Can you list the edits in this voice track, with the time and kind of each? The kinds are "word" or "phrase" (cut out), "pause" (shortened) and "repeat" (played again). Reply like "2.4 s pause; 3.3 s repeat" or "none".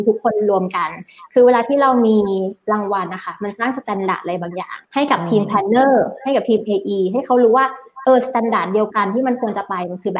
4.8 s pause